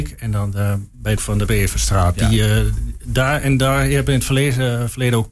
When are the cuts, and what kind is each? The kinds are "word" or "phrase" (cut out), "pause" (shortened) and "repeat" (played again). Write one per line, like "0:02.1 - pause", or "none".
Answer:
0:01.2 - phrase
0:01.5 - word